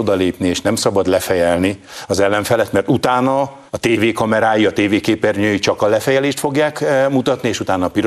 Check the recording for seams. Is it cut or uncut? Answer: cut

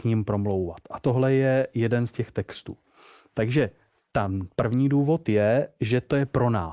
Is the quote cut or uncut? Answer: uncut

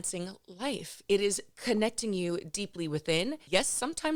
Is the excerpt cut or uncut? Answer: uncut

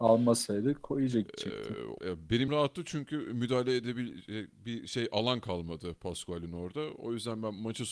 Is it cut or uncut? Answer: cut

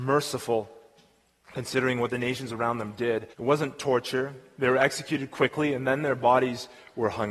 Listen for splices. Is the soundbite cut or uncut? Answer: cut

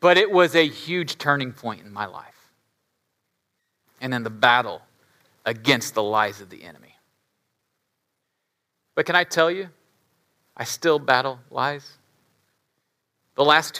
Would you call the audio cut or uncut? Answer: uncut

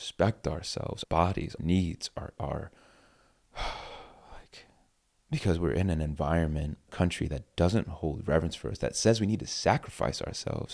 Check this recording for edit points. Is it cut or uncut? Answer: cut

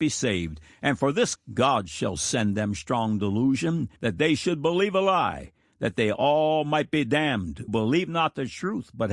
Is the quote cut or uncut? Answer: cut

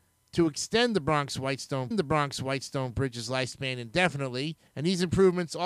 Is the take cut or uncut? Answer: cut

